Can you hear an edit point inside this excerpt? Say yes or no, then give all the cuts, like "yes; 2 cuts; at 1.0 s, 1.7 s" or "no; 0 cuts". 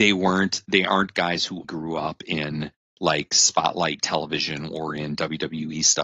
yes; 1 cut; at 1.6 s